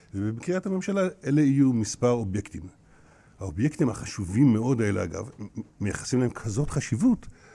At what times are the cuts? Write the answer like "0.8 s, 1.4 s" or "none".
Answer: none